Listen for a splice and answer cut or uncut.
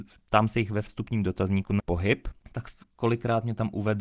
cut